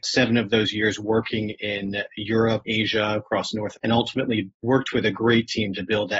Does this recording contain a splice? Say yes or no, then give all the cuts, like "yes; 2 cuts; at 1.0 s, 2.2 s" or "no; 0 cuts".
yes; 1 cut; at 3.7 s